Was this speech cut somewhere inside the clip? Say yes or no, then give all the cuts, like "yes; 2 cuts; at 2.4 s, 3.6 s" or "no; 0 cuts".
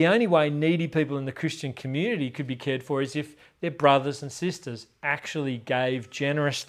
no; 0 cuts